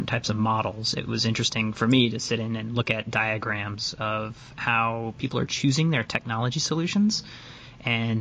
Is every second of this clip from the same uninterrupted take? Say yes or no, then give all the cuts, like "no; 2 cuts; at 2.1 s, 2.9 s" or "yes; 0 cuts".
yes; 0 cuts